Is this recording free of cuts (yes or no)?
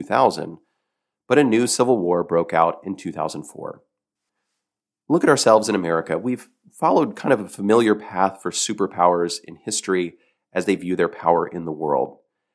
yes